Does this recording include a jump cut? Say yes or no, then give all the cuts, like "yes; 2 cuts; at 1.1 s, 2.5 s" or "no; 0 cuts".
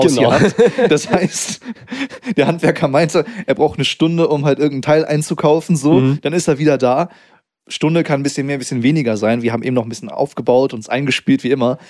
no; 0 cuts